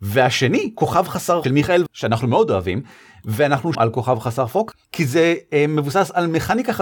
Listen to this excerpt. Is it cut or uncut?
cut